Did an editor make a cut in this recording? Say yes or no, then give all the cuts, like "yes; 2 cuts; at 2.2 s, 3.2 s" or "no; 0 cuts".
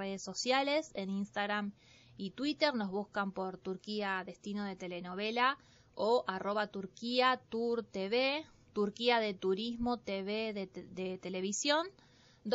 no; 0 cuts